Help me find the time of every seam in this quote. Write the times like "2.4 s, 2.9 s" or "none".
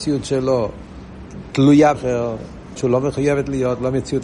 1.9 s, 2.8 s